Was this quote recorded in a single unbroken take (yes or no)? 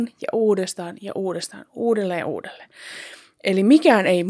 yes